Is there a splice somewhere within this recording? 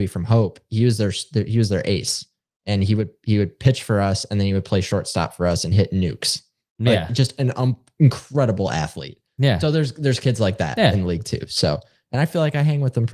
no; 0 cuts

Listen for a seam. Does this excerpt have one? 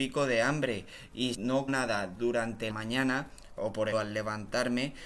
yes; 4 cuts; at 1.3 s, 1.7 s, 2.7 s, 3.9 s

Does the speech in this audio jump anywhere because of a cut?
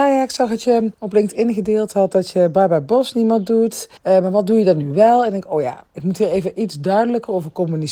yes; 2 cuts; at 0.9 s, 4.0 s

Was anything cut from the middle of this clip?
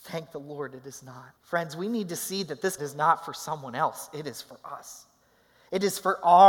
yes; 2 cuts; at 1.4 s, 2.8 s

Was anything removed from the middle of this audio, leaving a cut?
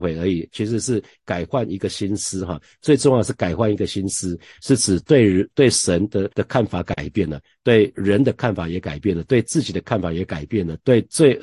yes; 1 cut; at 6.3 s

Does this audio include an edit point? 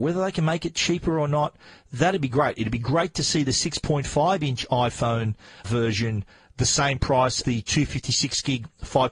yes; 2 cuts; at 5.6 s, 7.4 s

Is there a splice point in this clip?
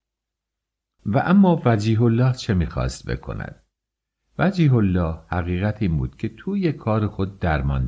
no; 0 cuts

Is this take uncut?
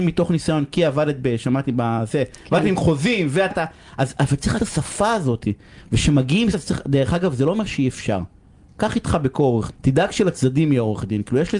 no; 4 cuts; at 3.5 s, 4.6 s, 6.5 s, 9.7 s

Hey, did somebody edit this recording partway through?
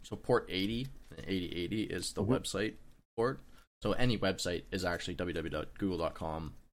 no; 0 cuts

